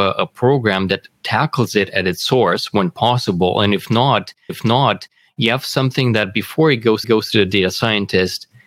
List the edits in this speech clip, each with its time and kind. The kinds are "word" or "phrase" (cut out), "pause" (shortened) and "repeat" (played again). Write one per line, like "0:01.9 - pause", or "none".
0:04.5 - repeat
0:07.0 - repeat